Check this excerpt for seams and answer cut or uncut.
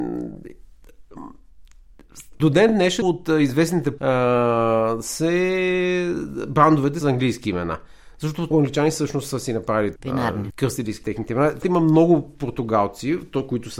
cut